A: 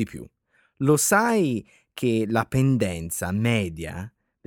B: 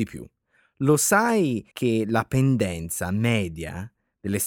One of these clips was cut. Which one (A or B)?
B